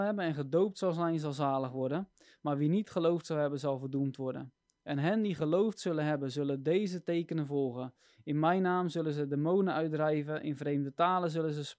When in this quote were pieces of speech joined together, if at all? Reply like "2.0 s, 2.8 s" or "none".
none